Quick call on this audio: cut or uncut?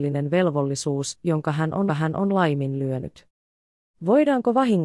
cut